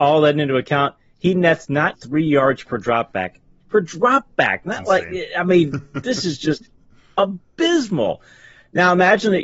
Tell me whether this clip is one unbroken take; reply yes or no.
no